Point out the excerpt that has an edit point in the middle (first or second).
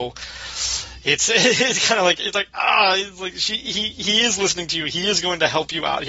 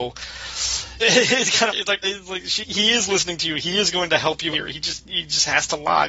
second